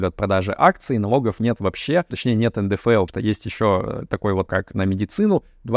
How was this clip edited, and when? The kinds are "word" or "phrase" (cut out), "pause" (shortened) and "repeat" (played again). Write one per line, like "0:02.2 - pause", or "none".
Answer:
0:02.1 - word
0:03.1 - word
0:04.5 - word